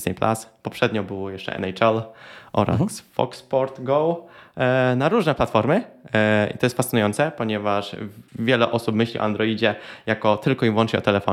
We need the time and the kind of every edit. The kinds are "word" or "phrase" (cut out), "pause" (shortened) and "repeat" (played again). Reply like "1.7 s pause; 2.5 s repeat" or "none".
8.3 s pause